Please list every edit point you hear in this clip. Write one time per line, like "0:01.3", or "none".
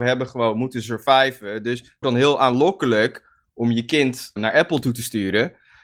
0:02.0
0:04.4